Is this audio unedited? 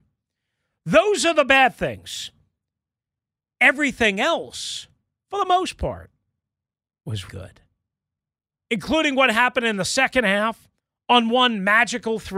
no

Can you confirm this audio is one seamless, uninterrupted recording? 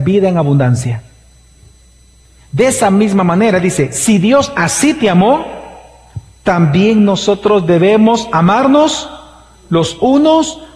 yes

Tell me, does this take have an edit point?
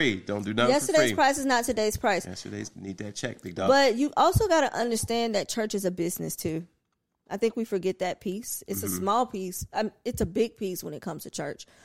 no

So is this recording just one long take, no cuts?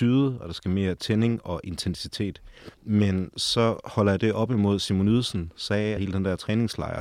no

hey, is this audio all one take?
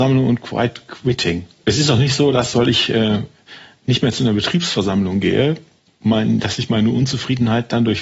yes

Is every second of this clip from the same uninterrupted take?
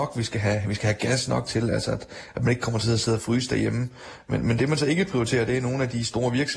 yes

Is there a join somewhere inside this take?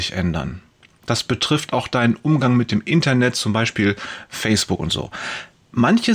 no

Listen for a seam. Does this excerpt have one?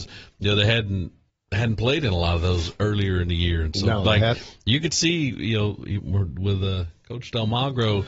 no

